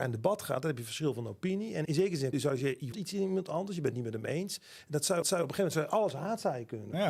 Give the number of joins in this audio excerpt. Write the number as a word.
four